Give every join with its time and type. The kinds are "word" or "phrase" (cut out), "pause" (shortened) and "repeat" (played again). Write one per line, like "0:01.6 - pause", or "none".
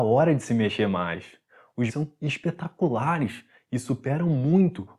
0:01.9 - word